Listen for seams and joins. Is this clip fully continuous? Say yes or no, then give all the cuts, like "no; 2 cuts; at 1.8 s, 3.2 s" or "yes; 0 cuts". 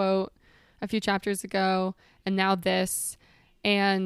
yes; 0 cuts